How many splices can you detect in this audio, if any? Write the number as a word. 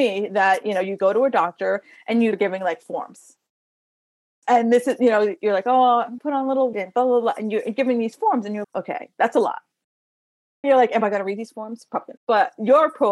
six